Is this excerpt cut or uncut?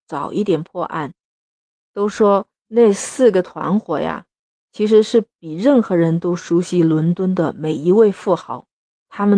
uncut